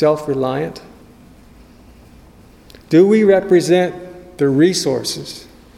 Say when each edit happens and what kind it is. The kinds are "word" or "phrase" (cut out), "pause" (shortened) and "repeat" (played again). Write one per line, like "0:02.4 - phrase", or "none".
none